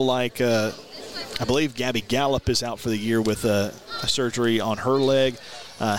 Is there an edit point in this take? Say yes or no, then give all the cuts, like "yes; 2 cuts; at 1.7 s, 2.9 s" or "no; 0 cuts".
no; 0 cuts